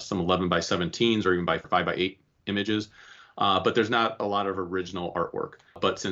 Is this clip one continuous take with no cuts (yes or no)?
yes